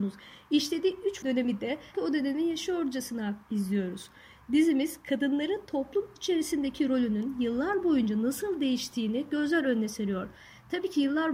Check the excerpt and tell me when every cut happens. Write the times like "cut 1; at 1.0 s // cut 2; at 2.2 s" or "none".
cut 1; at 1.2 s // cut 2; at 1.9 s // cut 3; at 3.4 s

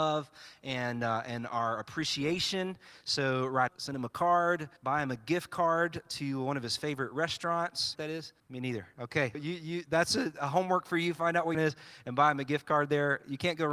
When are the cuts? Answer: cut 1; at 3.7 s // cut 2; at 4.8 s // cut 3; at 7.9 s // cut 4; at 8.4 s // cut 5; at 9.3 s // cut 6; at 11.5 s

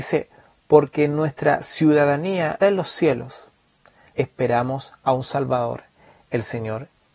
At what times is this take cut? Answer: cut 1; at 2.6 s // cut 2; at 4.1 s

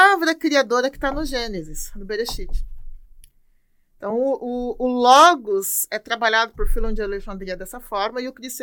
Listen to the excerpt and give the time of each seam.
none

